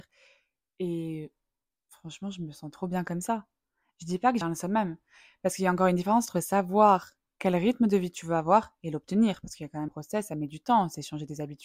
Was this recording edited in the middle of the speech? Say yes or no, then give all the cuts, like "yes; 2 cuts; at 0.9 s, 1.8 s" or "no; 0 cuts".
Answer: yes; 2 cuts; at 4.4 s, 9.9 s